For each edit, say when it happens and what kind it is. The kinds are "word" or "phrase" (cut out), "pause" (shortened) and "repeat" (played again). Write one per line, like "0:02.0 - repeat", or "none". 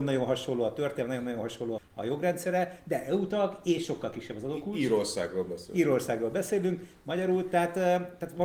0:01.8 - word